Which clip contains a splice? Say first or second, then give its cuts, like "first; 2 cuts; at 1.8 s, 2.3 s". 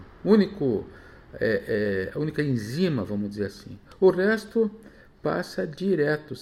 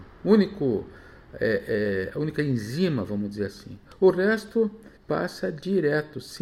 second; 1 cut; at 5.0 s